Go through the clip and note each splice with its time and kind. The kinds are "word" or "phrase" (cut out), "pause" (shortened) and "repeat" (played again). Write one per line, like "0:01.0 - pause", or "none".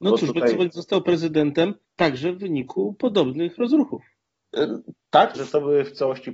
0:01.8 - pause
0:05.3 - word